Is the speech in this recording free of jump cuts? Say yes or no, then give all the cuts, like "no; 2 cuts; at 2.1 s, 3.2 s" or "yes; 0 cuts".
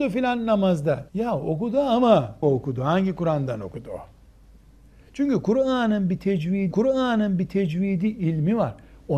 no; 3 cuts; at 1.1 s, 2.4 s, 6.7 s